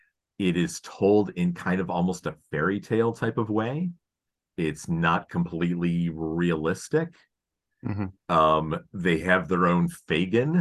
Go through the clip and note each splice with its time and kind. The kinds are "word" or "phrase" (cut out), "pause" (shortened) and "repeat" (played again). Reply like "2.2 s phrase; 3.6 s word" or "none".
none